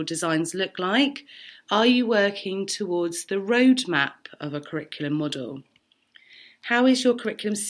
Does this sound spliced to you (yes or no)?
no